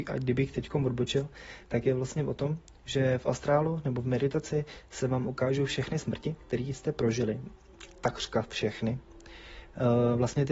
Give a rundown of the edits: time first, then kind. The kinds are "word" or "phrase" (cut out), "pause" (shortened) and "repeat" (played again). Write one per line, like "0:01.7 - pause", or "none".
none